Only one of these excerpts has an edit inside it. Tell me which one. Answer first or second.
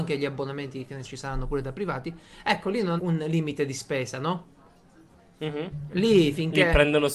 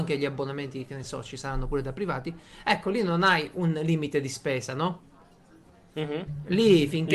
first